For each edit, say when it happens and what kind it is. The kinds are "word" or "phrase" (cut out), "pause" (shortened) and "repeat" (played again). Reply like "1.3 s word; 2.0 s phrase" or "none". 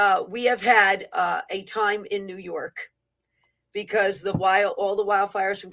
none